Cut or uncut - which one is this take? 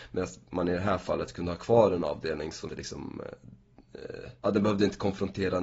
cut